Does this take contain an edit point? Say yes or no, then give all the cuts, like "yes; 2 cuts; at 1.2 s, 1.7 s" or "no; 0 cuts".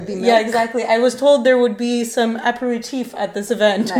no; 0 cuts